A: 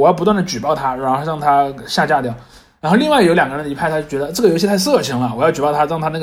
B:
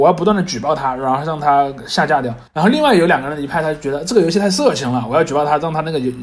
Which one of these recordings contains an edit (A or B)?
B